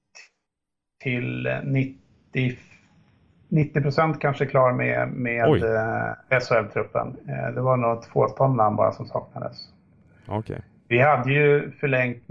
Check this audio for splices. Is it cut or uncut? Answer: uncut